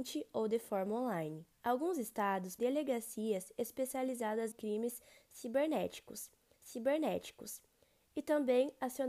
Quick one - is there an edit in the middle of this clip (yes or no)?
yes